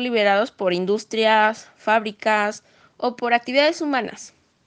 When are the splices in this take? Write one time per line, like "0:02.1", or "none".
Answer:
none